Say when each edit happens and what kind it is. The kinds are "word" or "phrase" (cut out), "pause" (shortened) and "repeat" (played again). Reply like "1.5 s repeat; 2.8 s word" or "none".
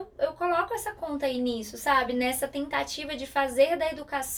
none

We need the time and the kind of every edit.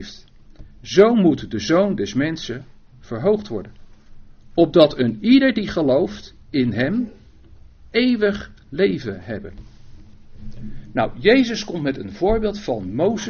none

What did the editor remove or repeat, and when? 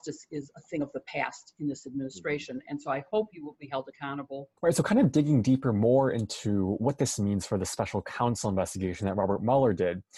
4.6 s pause

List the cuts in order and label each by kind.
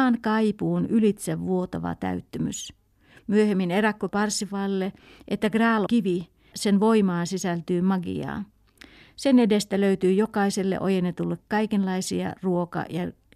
4.1 s word; 5.9 s word; 6.5 s word; 11.4 s word

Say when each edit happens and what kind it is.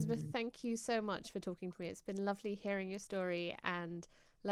none

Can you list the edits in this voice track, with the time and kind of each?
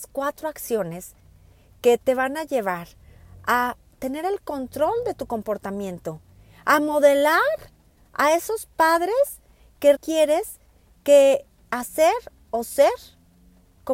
9.9 s word

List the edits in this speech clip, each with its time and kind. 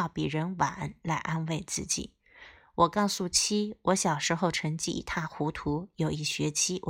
none

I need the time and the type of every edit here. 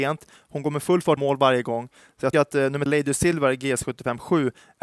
1.2 s word; 2.3 s word; 2.9 s word

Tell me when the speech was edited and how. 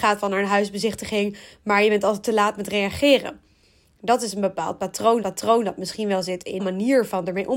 5.2 s repeat; 6.6 s word

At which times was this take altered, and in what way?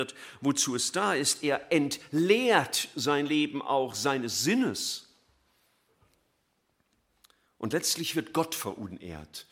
none

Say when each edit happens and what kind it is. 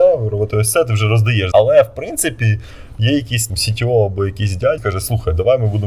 1.5 s word; 3.5 s word; 4.8 s word

